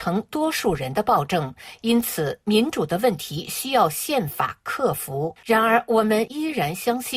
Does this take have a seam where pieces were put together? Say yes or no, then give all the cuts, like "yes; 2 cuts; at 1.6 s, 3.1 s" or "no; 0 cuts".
yes; 1 cut; at 5.4 s